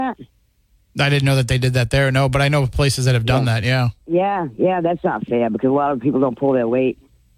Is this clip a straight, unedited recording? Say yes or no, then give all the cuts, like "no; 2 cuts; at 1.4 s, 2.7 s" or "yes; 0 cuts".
yes; 0 cuts